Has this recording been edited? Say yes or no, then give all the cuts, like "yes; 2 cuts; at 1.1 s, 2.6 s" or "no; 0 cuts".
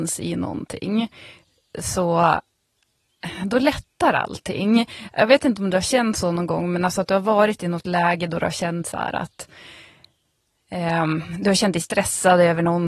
no; 0 cuts